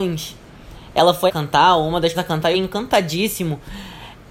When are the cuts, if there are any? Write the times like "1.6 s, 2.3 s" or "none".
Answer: 1.3 s, 2.1 s, 2.5 s